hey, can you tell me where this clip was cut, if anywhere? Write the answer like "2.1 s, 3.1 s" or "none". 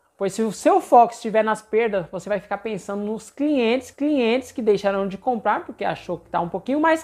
3.9 s